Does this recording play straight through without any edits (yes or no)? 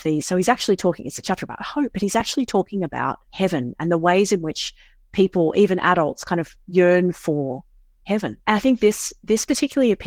no